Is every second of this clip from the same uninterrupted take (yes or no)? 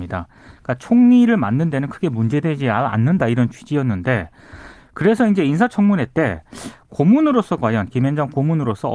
yes